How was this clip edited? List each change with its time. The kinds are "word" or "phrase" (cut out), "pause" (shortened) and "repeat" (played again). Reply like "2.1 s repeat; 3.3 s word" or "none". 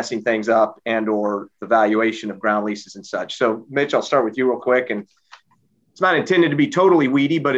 none